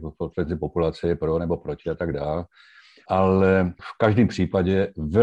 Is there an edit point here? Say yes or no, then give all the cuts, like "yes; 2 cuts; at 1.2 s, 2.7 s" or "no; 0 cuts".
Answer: no; 0 cuts